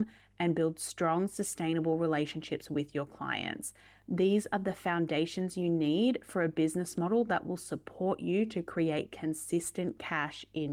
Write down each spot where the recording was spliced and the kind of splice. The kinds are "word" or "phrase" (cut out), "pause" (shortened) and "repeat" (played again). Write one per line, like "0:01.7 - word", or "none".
none